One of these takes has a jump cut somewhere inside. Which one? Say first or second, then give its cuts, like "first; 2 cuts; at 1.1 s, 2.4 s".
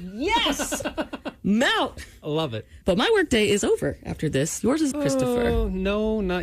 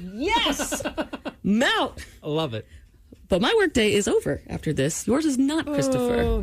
first; 2 cuts; at 2.8 s, 4.9 s